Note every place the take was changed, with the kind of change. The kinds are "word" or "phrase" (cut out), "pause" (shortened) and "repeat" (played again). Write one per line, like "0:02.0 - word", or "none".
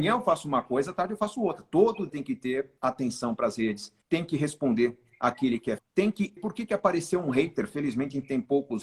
0:02.1 - word
0:02.8 - pause
0:04.0 - pause
0:05.8 - word
0:06.4 - word